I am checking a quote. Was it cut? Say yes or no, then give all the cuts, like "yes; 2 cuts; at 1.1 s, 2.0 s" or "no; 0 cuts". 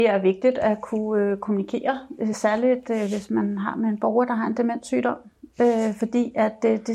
no; 0 cuts